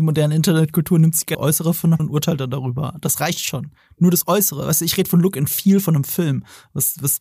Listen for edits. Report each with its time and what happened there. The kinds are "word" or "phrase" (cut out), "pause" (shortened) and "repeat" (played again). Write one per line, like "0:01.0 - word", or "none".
0:01.3 - word
0:02.0 - word